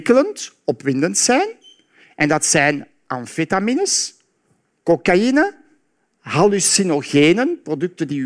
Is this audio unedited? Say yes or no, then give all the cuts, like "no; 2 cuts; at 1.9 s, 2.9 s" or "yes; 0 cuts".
yes; 0 cuts